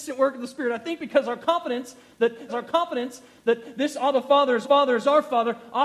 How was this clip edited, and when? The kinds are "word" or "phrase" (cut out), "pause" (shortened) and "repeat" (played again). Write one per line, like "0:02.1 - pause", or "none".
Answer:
0:02.5 - repeat
0:04.6 - repeat